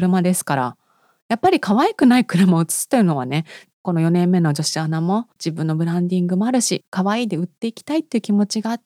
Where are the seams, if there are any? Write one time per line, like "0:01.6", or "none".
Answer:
0:05.3

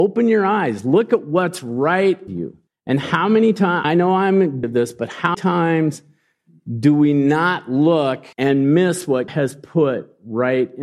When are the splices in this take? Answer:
0:02.3
0:02.7
0:03.8
0:04.6
0:05.3
0:08.3
0:09.3

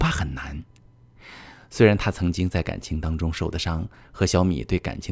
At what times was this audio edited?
none

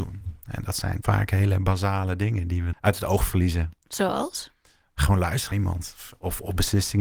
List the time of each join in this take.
0:01.0
0:02.7
0:05.5

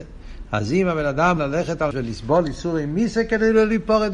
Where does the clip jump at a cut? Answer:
0:01.4
0:01.9

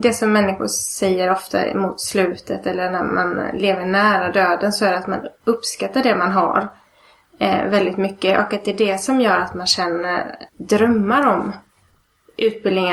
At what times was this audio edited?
0:10.5

